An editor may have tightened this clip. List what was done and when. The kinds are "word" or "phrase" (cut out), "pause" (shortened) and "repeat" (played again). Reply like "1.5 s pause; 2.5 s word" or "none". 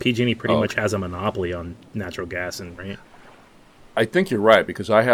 2.8 s word